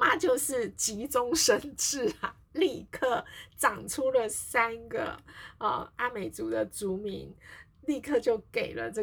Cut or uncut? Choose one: uncut